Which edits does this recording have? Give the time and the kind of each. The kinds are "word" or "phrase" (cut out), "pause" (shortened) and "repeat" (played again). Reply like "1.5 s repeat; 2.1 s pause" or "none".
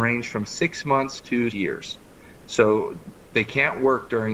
1.5 s word